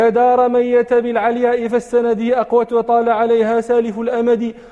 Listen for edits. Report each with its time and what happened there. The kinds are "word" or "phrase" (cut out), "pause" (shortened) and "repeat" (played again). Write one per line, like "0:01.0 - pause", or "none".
none

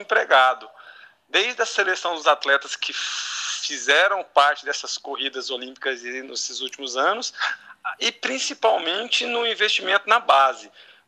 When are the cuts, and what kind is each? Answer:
none

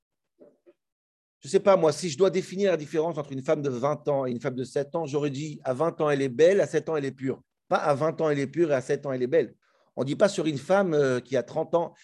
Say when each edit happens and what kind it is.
0:07.4 - pause
0:09.6 - pause

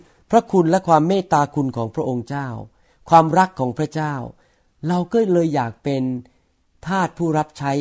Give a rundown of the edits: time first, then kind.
none

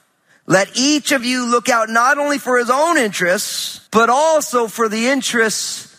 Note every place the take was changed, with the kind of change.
0:03.9 - pause

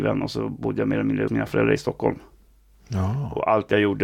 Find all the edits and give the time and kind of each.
0:01.3 - phrase

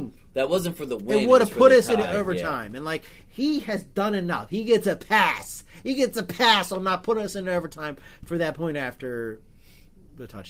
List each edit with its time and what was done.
none

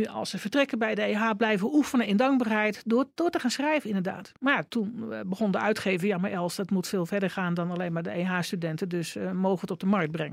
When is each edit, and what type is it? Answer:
0:04.4 - pause

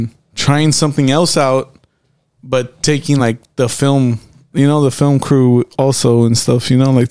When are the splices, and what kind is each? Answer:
none

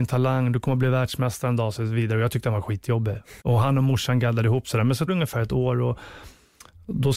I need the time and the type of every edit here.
0:03.4 - pause
0:05.1 - word

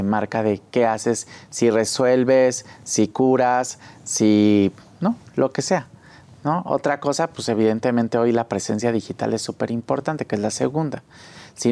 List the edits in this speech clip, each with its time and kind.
none

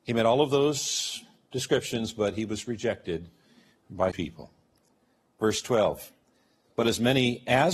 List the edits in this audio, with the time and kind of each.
0:04.1 - phrase

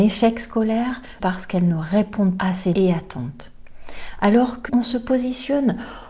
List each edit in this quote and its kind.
0:01.2 - word
0:02.4 - word
0:02.7 - word
0:04.7 - word

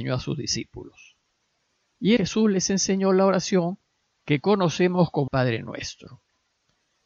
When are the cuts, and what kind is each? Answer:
0:02.2 - word
0:05.3 - word

